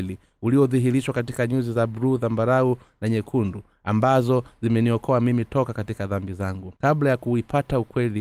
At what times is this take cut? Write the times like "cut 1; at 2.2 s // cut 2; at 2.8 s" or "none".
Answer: cut 1; at 6.8 s